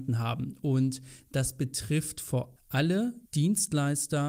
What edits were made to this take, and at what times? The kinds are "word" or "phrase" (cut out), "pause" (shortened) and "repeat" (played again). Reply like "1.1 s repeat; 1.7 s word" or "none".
2.6 s word; 3.3 s pause